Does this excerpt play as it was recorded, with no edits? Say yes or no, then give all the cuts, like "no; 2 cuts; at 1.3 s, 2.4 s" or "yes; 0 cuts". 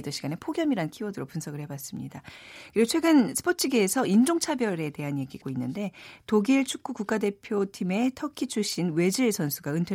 no; 1 cut; at 5.4 s